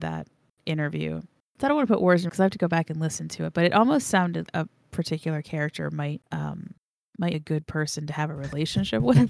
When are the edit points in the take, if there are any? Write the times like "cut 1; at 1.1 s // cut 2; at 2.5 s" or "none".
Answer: cut 1; at 2.3 s // cut 2; at 4.5 s // cut 3; at 7.3 s

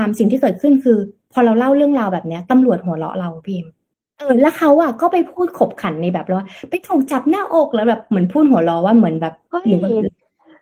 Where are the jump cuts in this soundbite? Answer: cut 1; at 3.9 s

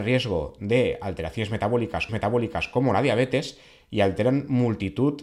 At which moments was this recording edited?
cut 1; at 2.1 s

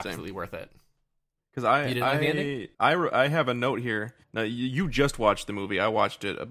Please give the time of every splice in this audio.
cut 1; at 2.7 s // cut 2; at 4.2 s

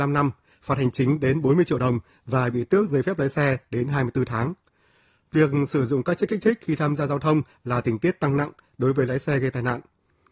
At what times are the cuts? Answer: none

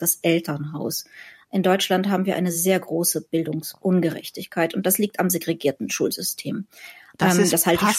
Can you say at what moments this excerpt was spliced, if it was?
none

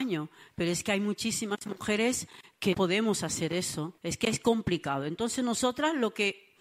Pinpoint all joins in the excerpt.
cut 1; at 2.7 s // cut 2; at 4.0 s

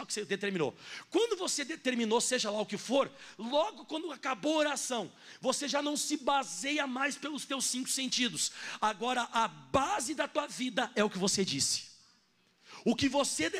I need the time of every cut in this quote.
none

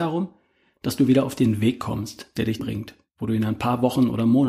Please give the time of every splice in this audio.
cut 1; at 2.6 s

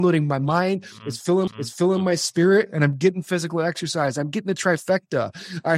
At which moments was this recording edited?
cut 1; at 1.5 s

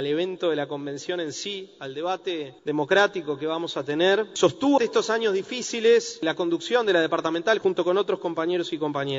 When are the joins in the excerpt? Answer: cut 1; at 4.8 s

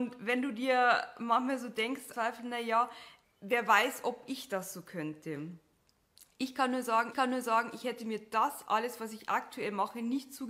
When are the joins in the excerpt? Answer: cut 1; at 2.1 s // cut 2; at 3.2 s // cut 3; at 7.1 s

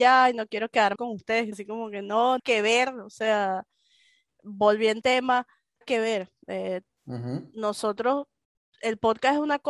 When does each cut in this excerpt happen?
cut 1; at 0.9 s // cut 2; at 1.5 s // cut 3; at 2.4 s // cut 4; at 5.0 s // cut 5; at 5.8 s

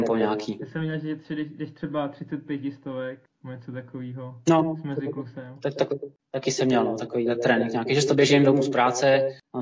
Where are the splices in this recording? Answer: none

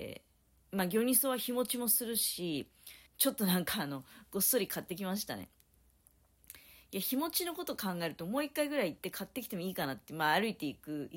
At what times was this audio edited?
cut 1; at 3.1 s

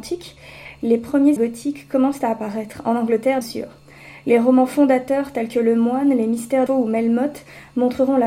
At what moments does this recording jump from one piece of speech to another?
cut 1; at 1.4 s // cut 2; at 3.4 s // cut 3; at 6.7 s

